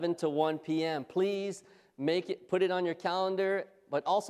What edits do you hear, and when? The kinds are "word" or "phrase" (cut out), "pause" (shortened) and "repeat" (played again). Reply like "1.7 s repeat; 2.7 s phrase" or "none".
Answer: none

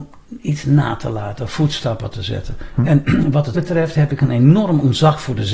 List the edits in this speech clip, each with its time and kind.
3.5 s word

